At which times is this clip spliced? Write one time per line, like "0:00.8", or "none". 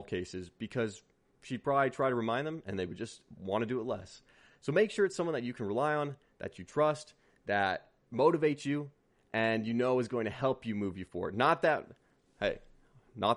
none